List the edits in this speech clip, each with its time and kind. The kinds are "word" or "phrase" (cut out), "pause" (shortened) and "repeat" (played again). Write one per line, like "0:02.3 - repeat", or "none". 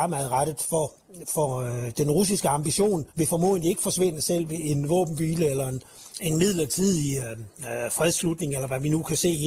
0:03.1 - pause
0:06.1 - pause

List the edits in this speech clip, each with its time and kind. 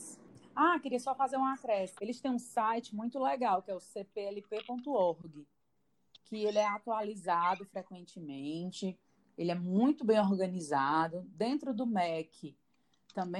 none

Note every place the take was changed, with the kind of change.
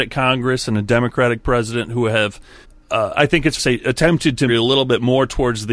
0:02.6 - pause
0:03.6 - phrase
0:04.5 - phrase

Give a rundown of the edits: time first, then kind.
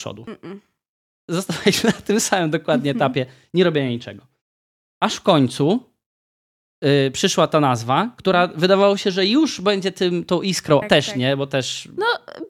0:10.8 - word

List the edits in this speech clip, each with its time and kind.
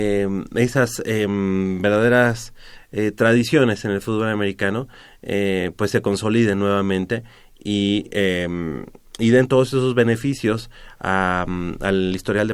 none

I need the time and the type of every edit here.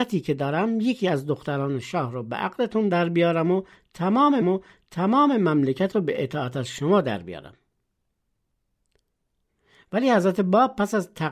0:04.4 - repeat

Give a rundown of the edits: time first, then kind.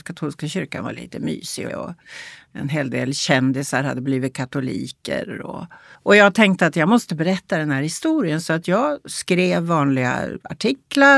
0:01.7 - phrase
0:05.9 - pause

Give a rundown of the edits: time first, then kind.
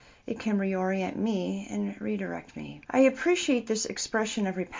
0:02.8 - pause

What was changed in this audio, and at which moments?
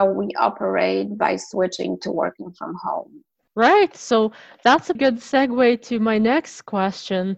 0:04.9 - word

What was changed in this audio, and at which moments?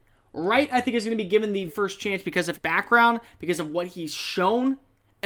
0:01.7 - word
0:02.5 - word

